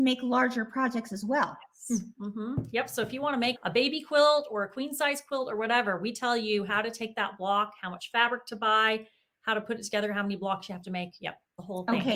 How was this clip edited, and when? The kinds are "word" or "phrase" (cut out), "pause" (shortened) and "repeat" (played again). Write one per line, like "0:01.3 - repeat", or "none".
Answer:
0:03.6 - word